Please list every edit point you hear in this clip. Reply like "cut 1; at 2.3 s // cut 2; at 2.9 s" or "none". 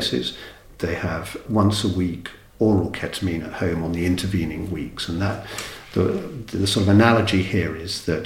cut 1; at 1.5 s